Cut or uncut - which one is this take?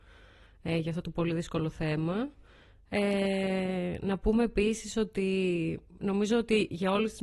uncut